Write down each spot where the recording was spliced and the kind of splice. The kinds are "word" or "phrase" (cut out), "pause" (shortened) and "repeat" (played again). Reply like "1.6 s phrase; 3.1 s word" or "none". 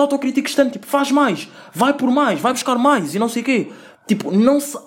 none